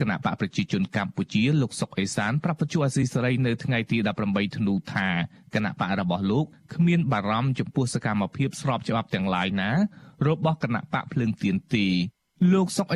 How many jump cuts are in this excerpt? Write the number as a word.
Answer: zero